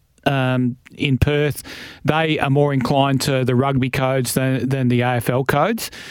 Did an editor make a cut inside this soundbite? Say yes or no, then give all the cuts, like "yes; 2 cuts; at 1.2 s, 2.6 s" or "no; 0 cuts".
no; 0 cuts